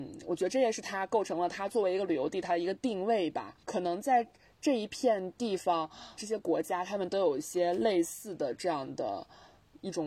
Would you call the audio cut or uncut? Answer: cut